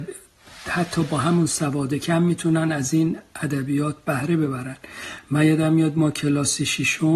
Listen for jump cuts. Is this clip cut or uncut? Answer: uncut